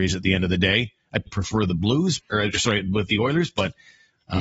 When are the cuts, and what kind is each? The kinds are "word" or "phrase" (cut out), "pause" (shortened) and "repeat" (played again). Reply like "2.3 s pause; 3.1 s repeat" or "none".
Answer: 1.3 s word; 2.2 s word